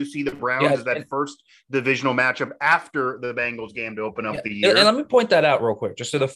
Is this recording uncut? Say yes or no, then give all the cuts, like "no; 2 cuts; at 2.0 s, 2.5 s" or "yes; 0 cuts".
yes; 0 cuts